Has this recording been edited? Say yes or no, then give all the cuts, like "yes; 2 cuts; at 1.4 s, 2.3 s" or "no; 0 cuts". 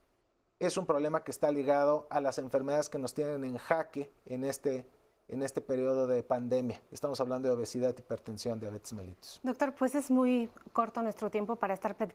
no; 0 cuts